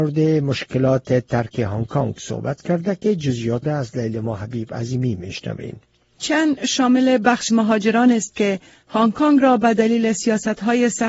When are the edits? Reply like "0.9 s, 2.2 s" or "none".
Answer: 3.6 s, 7.5 s